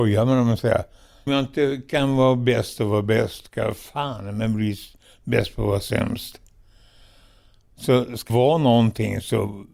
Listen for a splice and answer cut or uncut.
cut